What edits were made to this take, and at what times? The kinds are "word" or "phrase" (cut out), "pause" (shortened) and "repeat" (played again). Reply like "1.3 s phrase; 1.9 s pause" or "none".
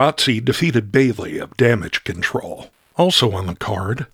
none